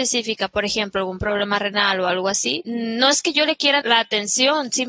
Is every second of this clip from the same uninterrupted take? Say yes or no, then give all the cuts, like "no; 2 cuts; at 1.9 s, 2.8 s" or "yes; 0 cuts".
no; 1 cut; at 3.8 s